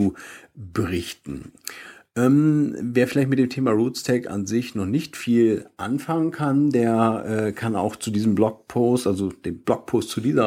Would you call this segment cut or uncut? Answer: uncut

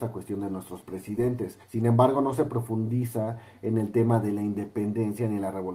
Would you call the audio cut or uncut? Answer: cut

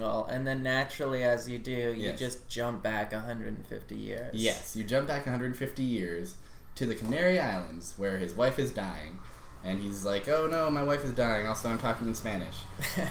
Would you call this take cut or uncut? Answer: uncut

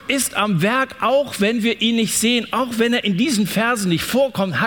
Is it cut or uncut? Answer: uncut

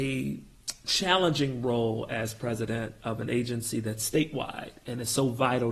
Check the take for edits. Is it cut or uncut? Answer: uncut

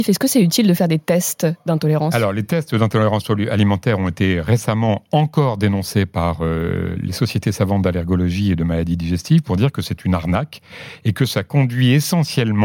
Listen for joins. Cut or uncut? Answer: uncut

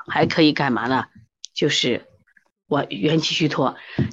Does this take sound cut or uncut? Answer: uncut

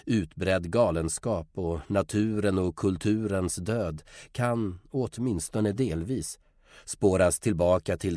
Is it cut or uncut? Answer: uncut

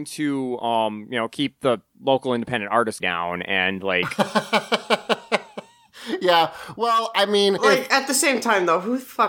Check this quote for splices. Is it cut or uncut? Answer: cut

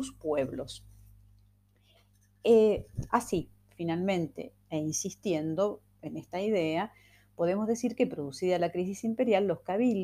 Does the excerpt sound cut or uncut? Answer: uncut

